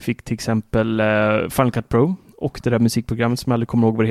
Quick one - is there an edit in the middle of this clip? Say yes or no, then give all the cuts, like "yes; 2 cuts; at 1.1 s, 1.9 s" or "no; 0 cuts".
no; 0 cuts